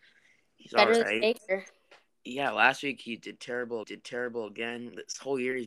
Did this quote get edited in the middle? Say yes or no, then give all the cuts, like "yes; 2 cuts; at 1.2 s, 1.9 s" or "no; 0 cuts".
yes; 2 cuts; at 2.1 s, 3.8 s